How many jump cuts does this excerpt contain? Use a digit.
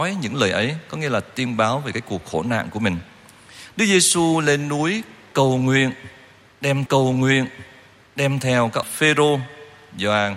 2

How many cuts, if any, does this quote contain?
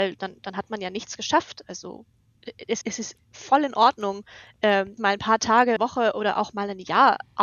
3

